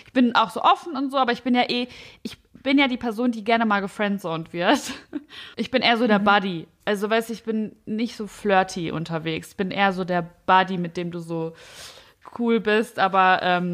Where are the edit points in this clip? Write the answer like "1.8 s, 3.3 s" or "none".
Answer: 5.5 s